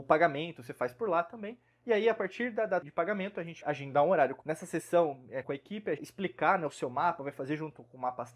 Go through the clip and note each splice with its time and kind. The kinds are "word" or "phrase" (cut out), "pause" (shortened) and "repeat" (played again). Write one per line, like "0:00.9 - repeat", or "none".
0:02.8 - word
0:03.6 - word
0:04.4 - word
0:05.4 - word
0:06.0 - phrase